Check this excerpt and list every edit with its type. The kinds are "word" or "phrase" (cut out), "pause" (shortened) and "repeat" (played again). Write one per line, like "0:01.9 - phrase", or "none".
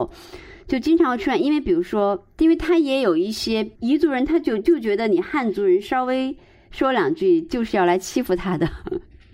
0:03.8 - pause